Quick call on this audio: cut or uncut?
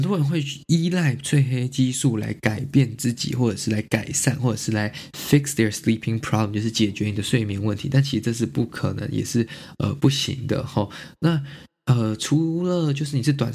uncut